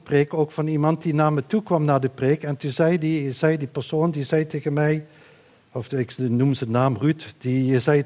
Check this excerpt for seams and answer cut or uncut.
uncut